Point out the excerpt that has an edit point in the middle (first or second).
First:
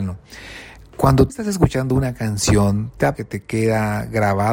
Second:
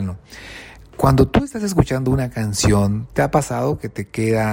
first